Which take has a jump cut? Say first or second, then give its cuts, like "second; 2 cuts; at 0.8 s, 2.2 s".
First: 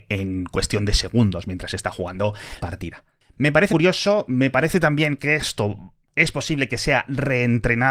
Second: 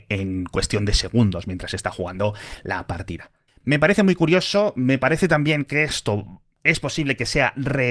first; 2 cuts; at 2.6 s, 3.7 s